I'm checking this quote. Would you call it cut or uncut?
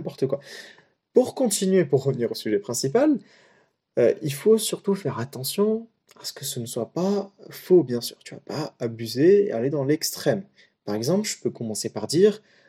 uncut